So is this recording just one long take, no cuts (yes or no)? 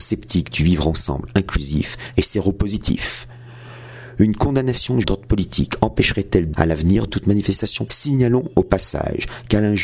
no